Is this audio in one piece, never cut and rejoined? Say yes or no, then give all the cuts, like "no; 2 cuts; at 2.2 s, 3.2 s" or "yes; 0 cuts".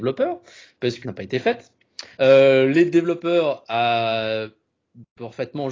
no; 2 cuts; at 1.0 s, 2.1 s